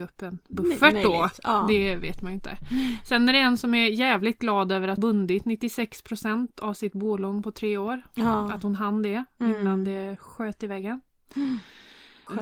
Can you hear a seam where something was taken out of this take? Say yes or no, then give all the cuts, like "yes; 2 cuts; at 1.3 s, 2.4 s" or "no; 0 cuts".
yes; 1 cut; at 5.0 s